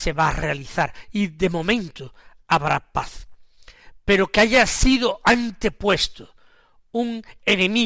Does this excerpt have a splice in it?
no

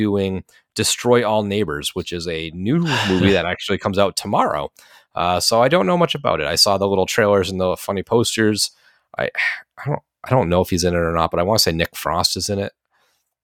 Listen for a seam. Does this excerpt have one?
no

